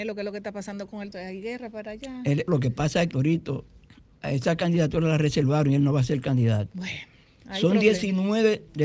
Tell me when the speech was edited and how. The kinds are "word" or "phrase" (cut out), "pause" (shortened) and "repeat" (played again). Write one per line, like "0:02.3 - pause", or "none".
0:01.1 - phrase
0:02.5 - word
0:03.1 - word